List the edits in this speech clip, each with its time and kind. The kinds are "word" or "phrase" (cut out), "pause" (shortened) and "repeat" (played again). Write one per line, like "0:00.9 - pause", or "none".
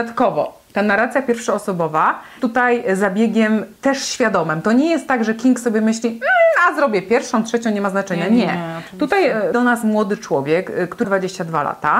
0:02.4 - word
0:09.5 - word
0:11.0 - word